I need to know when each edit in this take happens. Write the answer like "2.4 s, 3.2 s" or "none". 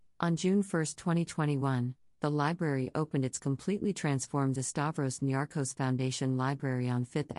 4.6 s

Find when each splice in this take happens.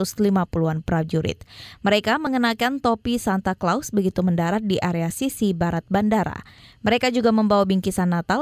none

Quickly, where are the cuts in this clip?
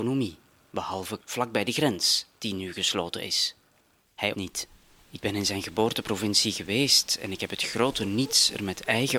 1.2 s, 4.3 s

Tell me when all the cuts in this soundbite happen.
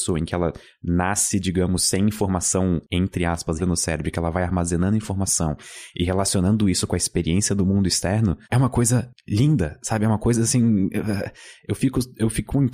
3.6 s, 8.4 s

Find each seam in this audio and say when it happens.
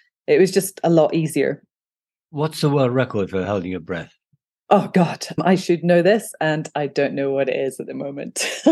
none

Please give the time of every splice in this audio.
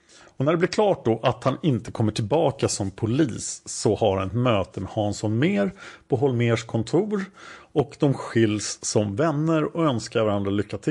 none

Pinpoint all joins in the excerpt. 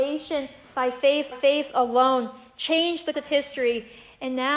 1.3 s, 3.1 s

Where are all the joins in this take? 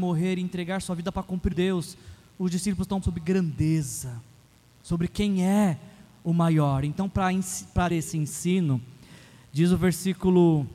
1.5 s, 3.0 s, 7.9 s

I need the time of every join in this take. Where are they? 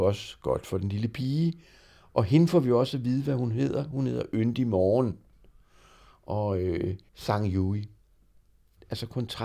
7.1 s

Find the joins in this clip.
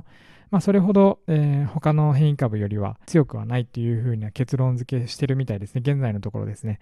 1.2 s, 3.0 s

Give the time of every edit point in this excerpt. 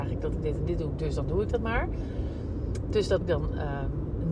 3.2 s

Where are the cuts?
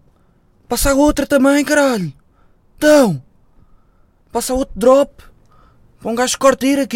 none

